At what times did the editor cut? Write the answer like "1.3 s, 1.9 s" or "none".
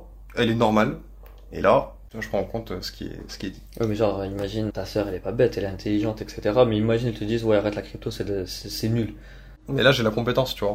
4.7 s

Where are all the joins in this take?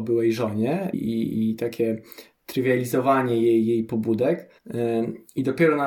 0.9 s, 4.6 s

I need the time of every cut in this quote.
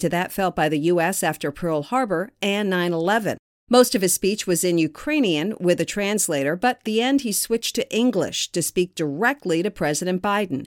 6.8 s

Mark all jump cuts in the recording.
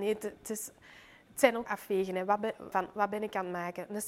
1.7 s, 2.7 s

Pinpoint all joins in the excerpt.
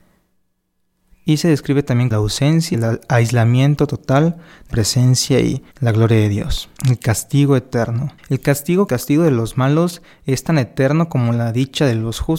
2.1 s, 2.7 s, 4.7 s, 5.7 s, 6.8 s, 8.2 s, 8.9 s

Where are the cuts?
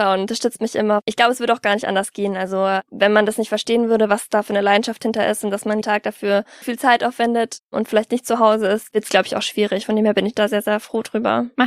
5.8 s, 6.6 s

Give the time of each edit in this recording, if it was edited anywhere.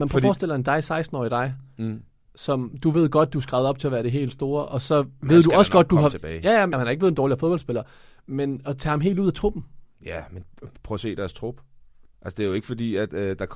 6.7 s

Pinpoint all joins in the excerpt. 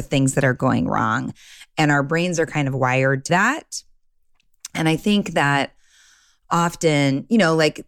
3.3 s

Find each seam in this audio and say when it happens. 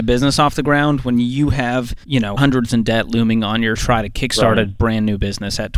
2.0 s, 2.4 s, 2.7 s, 3.8 s

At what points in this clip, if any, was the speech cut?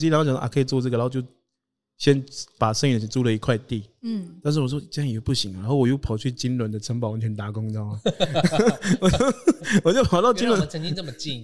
none

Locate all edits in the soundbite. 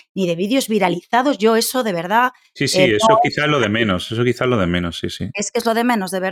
none

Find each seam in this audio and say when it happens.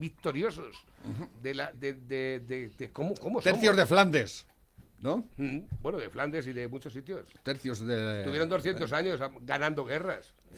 1.7 s

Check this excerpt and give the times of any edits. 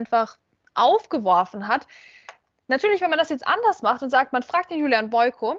none

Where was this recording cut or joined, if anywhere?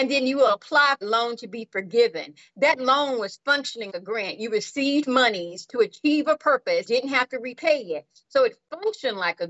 1.0 s, 3.9 s, 6.8 s

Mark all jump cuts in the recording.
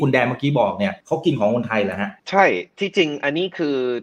1.0 s, 2.2 s

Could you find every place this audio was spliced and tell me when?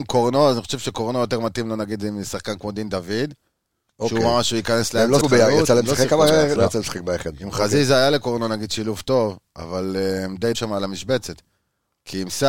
5.2 s, 6.6 s, 10.5 s

